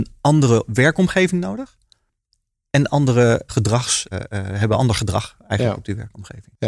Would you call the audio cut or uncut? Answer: cut